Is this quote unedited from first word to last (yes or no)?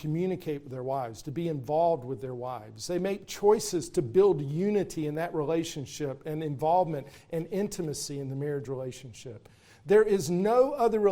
yes